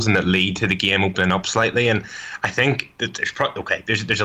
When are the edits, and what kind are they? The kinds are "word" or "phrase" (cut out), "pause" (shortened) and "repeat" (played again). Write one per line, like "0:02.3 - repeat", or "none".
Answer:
none